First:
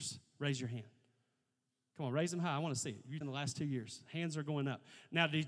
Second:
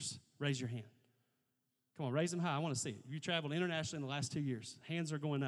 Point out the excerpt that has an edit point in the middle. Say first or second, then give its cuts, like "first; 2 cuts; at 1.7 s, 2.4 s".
first; 1 cut; at 3.2 s